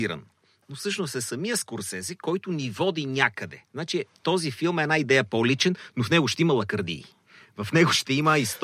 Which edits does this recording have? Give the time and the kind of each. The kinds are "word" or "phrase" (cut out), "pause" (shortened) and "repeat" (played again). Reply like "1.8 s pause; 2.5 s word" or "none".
3.7 s pause